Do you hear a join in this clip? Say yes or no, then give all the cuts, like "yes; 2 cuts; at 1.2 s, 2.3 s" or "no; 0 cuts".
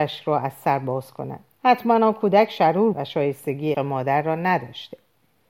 yes; 3 cuts; at 1.5 s, 2.9 s, 3.7 s